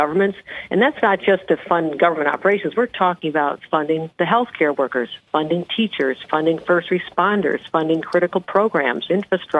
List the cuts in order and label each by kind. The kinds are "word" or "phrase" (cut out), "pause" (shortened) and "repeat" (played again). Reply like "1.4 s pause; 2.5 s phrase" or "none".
none